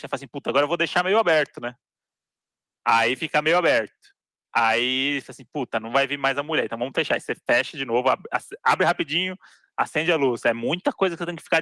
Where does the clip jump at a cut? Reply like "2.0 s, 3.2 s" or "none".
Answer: none